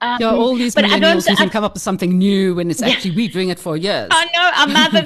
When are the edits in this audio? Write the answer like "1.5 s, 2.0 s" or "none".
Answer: 1.5 s, 3.3 s